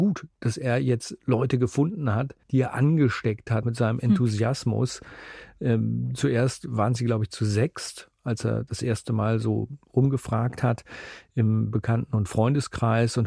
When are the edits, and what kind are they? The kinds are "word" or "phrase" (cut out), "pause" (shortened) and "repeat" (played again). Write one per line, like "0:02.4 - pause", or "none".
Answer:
0:02.4 - pause
0:03.6 - word